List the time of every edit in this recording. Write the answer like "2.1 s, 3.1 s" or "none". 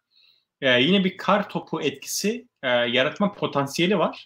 none